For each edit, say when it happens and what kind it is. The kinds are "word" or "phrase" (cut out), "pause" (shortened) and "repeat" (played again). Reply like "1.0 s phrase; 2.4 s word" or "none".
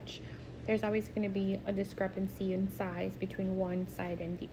none

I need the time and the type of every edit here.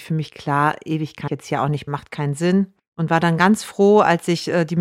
1.3 s word; 1.9 s word; 2.8 s pause

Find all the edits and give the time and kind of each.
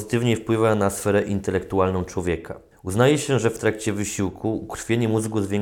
2.7 s pause

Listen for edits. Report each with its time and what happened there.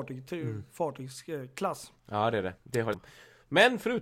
2.0 s pause; 2.9 s phrase

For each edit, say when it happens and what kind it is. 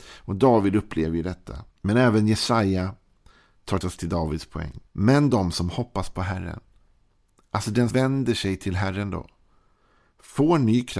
1.7 s pause; 3.8 s word; 4.9 s pause; 7.9 s word

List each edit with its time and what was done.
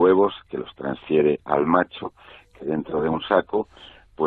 none

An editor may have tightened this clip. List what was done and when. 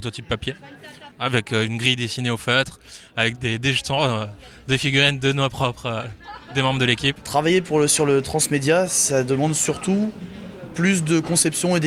none

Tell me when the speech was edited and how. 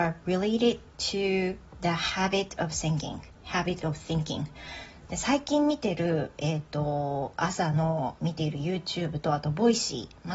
3.4 s pause

